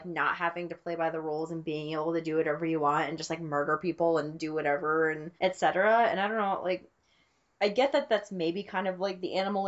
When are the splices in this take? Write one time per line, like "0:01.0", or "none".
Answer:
0:05.4